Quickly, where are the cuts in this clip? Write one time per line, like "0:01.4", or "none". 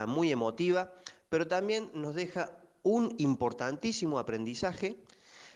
none